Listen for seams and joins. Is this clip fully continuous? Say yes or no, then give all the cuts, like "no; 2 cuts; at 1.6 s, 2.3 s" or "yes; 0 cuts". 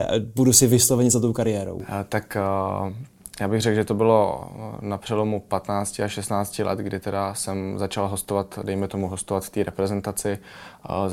yes; 0 cuts